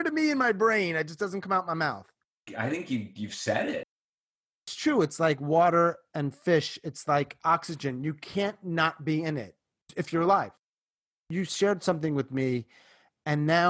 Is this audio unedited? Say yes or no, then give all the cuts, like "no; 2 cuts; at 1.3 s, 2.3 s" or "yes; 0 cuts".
yes; 0 cuts